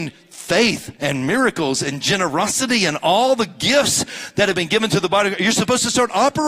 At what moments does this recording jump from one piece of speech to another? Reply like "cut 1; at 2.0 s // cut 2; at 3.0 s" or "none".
cut 1; at 1.0 s